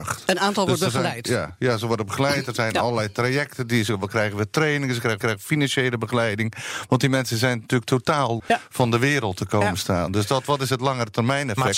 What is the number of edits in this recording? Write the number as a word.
two